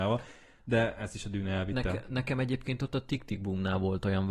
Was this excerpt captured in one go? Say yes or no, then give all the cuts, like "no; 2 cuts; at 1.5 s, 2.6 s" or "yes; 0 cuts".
yes; 0 cuts